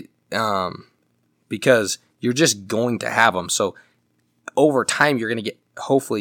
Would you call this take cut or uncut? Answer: uncut